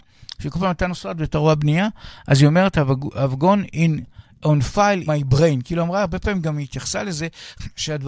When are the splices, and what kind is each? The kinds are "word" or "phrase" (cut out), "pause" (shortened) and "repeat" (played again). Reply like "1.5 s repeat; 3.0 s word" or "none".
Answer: 5.1 s word